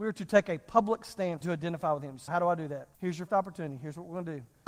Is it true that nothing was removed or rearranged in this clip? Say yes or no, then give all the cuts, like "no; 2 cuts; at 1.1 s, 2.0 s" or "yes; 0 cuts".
no; 4 cuts; at 1.4 s, 2.3 s, 2.9 s, 3.3 s